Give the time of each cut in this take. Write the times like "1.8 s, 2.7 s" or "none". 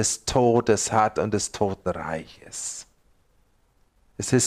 none